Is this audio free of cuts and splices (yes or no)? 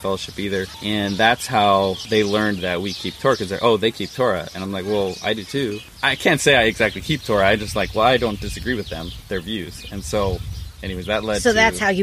yes